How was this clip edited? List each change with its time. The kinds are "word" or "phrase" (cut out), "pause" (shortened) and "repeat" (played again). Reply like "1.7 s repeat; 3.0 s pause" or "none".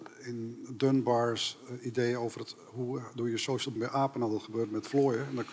3.8 s word